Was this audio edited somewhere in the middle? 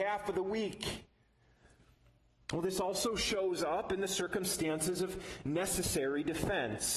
no; 0 cuts

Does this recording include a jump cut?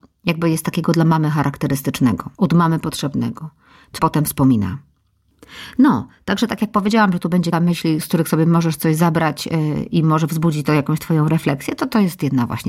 yes; 3 cuts; at 2.3 s, 4.0 s, 7.5 s

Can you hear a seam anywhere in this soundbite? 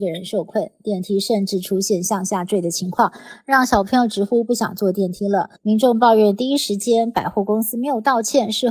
yes; 1 cut; at 5.6 s

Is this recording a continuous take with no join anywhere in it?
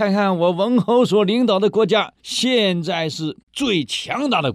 no; 2 cuts; at 2.2 s, 3.4 s

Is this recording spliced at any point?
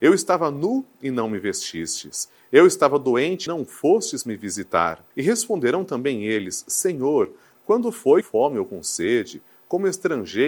yes; 3 cuts; at 3.5 s, 5.1 s, 8.2 s

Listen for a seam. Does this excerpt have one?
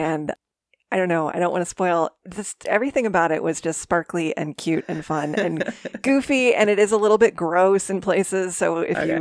no; 0 cuts

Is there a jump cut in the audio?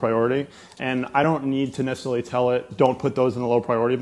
no; 0 cuts

